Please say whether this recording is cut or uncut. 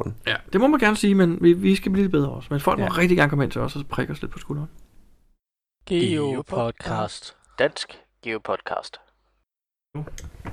uncut